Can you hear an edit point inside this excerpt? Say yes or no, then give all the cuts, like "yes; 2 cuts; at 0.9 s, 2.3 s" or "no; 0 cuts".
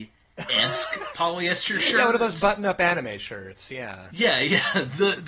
no; 0 cuts